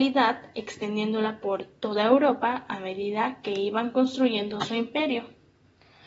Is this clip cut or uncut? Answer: uncut